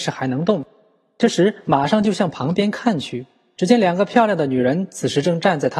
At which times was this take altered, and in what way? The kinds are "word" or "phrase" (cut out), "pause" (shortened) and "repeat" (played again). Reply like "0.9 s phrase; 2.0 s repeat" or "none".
none